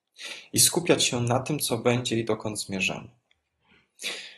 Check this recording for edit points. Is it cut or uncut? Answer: uncut